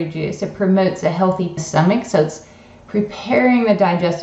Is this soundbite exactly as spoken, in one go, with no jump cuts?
no; 1 cut; at 1.6 s

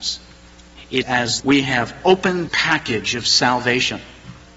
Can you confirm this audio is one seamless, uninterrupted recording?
no; 3 cuts; at 1.0 s, 1.4 s, 2.5 s

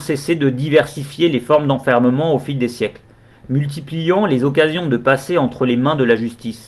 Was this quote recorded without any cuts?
yes; 0 cuts

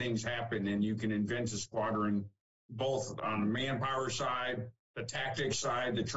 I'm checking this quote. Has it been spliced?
no; 0 cuts

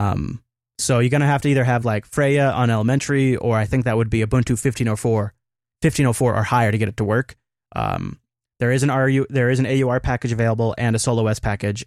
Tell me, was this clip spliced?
no; 0 cuts

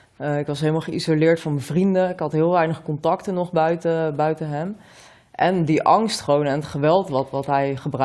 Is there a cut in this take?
no; 0 cuts

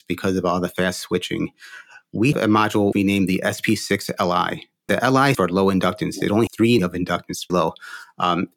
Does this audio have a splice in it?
yes; 7 cuts; at 2.3 s, 2.9 s, 4.9 s, 5.3 s, 6.5 s, 6.8 s, 7.5 s

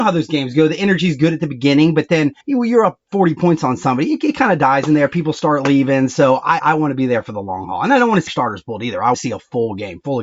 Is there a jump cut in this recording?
yes; 4 cuts; at 2.4 s, 6.6 s, 8.3 s, 9.1 s

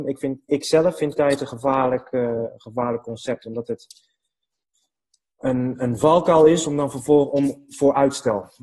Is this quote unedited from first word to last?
yes; 0 cuts

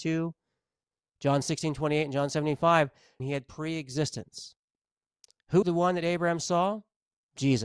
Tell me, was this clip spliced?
yes; 2 cuts; at 3.2 s, 5.6 s

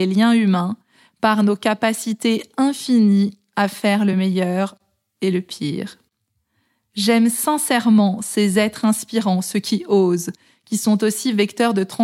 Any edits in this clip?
no; 0 cuts

